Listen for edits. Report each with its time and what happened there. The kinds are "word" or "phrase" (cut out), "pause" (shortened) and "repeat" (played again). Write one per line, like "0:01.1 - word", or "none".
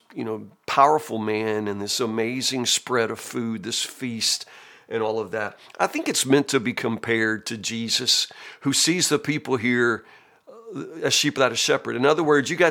none